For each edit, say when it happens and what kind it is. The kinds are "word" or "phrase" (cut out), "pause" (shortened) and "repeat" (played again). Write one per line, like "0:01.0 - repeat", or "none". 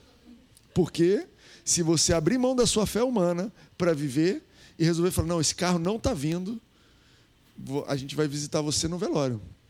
none